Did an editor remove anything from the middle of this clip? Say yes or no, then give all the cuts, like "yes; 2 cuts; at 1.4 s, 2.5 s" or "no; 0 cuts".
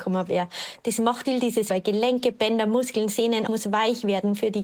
yes; 3 cuts; at 1.2 s, 1.7 s, 3.5 s